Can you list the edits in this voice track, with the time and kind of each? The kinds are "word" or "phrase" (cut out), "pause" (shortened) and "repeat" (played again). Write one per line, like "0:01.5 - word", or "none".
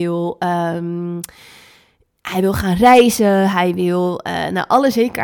none